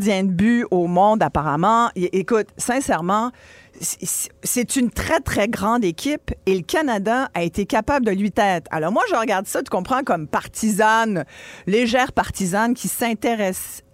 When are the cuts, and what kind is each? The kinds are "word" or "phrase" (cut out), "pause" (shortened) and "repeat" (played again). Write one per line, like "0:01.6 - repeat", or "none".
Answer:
0:08.3 - word